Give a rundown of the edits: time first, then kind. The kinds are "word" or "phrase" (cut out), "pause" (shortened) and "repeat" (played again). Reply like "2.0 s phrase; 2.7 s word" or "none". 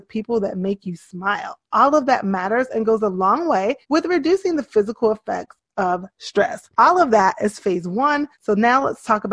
3.8 s pause; 6.7 s pause; 8.3 s pause